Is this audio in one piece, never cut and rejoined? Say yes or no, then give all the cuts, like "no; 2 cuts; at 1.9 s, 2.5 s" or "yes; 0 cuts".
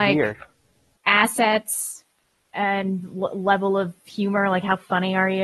yes; 0 cuts